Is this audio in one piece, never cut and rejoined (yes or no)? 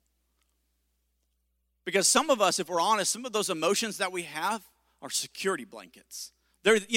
yes